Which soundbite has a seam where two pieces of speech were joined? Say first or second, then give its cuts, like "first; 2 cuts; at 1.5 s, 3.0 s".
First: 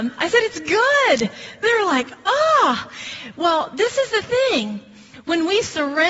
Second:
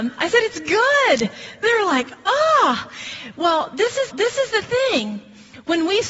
second; 1 cut; at 4.1 s